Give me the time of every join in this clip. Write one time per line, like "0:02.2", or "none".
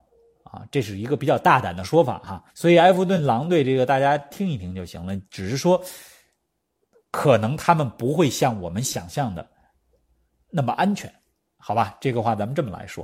0:02.5

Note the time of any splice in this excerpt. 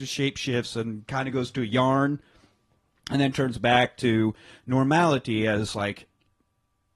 none

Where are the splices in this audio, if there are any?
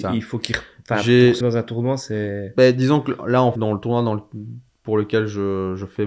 0:01.4
0:03.6

